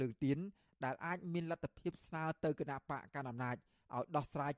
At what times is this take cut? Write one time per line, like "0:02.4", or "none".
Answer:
none